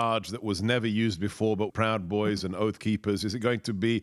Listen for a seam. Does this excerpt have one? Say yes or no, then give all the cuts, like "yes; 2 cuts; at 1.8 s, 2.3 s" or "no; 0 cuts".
yes; 1 cut; at 1.7 s